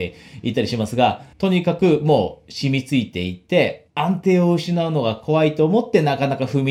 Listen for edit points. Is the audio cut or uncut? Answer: cut